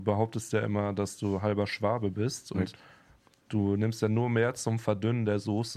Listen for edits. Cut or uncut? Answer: cut